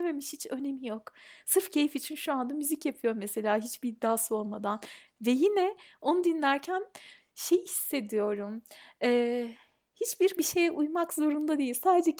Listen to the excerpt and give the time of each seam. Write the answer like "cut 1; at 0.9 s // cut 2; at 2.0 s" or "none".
cut 1; at 10.4 s